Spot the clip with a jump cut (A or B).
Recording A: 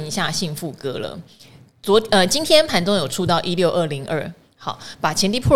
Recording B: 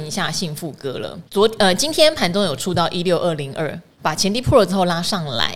B